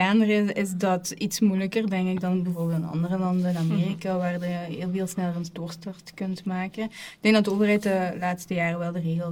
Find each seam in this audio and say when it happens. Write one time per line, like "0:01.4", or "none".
none